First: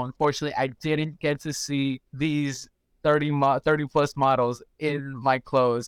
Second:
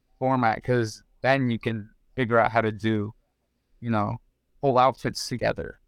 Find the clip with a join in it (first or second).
first